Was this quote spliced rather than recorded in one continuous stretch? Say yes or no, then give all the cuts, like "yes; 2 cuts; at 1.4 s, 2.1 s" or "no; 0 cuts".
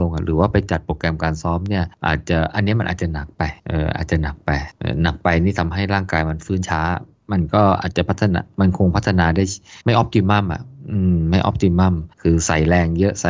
yes; 2 cuts; at 9.8 s, 12.1 s